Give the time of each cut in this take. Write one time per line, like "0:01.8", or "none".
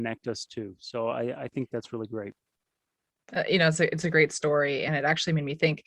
none